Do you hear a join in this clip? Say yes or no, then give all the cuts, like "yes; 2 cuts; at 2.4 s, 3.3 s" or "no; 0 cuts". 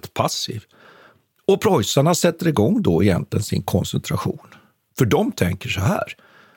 no; 0 cuts